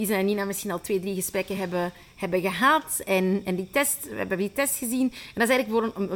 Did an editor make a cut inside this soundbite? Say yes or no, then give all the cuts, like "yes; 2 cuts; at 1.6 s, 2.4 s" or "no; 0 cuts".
no; 0 cuts